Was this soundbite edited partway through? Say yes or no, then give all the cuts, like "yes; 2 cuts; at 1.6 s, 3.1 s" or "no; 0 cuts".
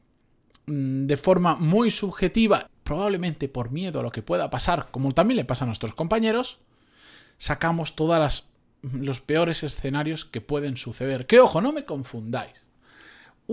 yes; 1 cut; at 2.7 s